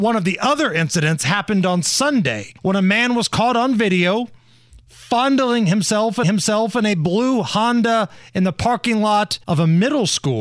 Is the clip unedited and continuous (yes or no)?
no